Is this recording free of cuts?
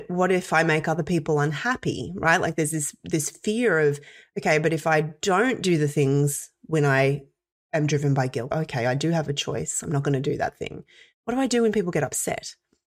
no; 1 cut; at 8.5 s

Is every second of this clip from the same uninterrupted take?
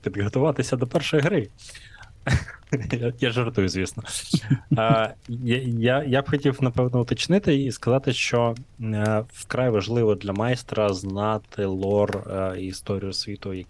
yes; 0 cuts

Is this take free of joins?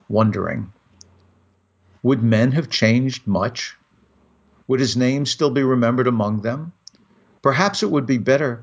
yes; 0 cuts

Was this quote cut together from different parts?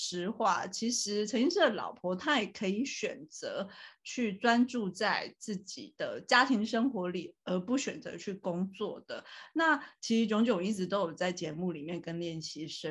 no; 0 cuts

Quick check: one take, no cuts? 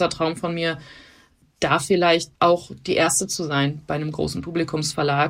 no; 1 cut; at 2.3 s

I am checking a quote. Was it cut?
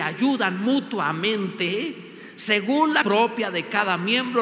yes; 1 cut; at 3.0 s

